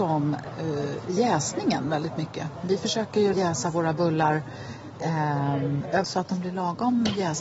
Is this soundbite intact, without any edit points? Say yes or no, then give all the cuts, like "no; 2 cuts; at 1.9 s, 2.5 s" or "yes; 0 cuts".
no; 2 cuts; at 3.3 s, 6.0 s